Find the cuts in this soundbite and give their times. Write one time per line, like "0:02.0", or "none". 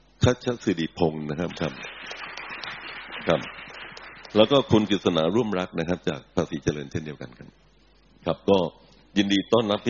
none